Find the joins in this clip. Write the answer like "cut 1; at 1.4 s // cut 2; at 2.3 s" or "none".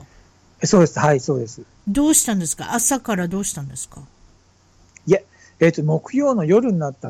none